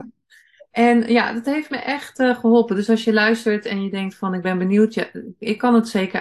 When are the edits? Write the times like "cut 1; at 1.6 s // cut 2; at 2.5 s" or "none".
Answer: none